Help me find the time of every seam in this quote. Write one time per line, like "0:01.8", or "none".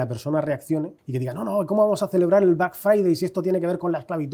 0:01.0